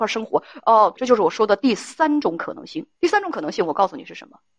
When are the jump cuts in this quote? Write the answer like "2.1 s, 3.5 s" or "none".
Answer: 0.9 s, 2.9 s